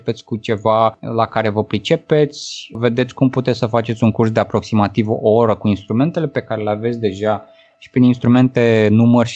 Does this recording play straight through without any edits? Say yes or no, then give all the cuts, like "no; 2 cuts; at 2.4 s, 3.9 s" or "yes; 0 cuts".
yes; 0 cuts